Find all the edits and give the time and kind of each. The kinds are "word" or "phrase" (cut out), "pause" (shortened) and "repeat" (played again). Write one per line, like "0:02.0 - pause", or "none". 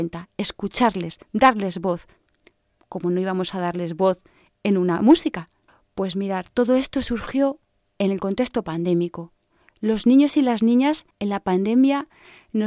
0:01.2 - pause
0:11.1 - pause